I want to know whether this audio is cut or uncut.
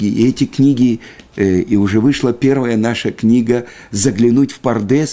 uncut